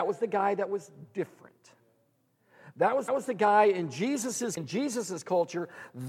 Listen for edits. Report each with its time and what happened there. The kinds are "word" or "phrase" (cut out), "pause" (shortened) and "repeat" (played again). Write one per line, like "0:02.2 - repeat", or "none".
0:03.1 - repeat
0:04.6 - word